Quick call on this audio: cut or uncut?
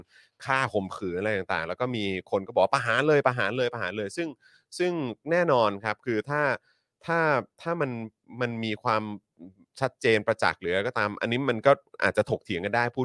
uncut